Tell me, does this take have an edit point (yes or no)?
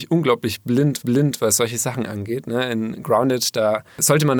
yes